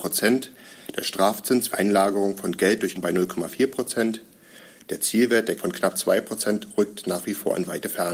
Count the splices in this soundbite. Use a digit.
3